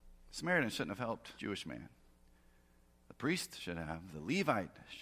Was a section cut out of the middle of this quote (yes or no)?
yes